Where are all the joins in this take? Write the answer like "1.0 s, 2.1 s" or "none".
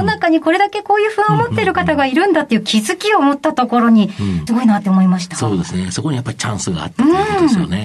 4.5 s

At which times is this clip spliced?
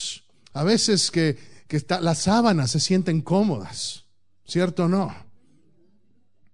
none

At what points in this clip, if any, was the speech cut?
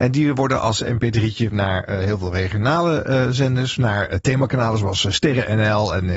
1.5 s

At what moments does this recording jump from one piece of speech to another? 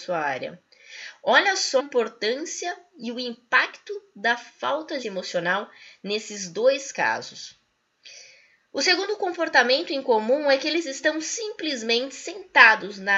1.8 s, 5.0 s

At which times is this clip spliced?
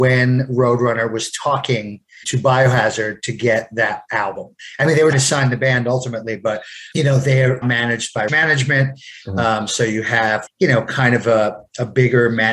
2.2 s, 5.1 s, 6.9 s, 7.6 s, 8.3 s, 10.5 s

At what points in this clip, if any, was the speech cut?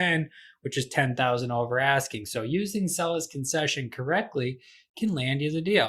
none

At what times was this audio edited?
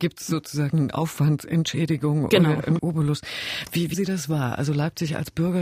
2.8 s, 3.9 s

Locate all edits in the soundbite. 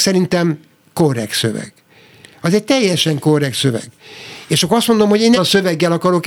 5.4 s

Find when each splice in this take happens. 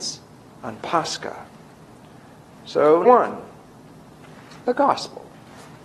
3.0 s

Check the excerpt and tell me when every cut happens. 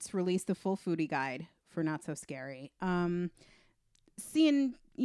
none

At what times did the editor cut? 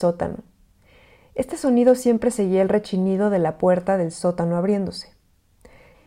none

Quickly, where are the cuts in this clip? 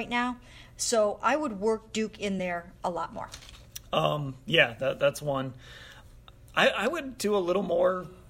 none

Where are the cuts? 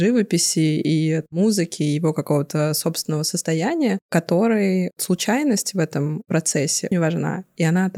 6.9 s

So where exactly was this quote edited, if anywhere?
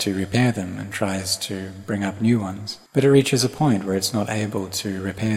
2.9 s

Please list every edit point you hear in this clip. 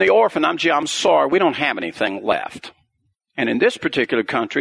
none

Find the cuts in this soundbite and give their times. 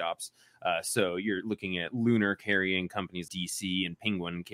3.3 s

